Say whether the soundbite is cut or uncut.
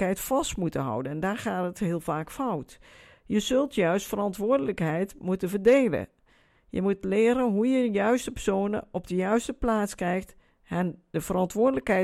uncut